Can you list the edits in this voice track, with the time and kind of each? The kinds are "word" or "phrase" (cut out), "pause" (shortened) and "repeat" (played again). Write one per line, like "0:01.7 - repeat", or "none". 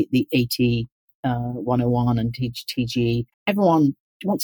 0:03.3 - pause